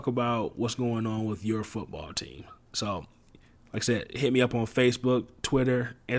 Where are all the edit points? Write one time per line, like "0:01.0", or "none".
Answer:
none